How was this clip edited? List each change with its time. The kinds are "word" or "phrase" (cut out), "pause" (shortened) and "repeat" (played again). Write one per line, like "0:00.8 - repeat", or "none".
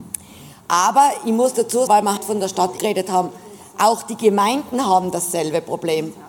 0:01.9 - word
0:02.2 - word
0:02.8 - word